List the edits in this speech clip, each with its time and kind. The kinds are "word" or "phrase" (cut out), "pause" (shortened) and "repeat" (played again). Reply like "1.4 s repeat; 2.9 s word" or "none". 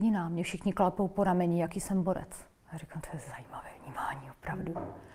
2.5 s pause